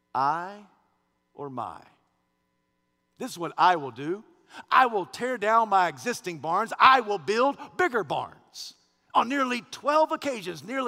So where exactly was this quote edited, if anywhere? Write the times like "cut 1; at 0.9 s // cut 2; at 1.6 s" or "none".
none